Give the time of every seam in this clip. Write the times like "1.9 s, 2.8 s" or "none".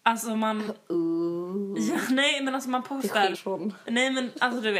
3.3 s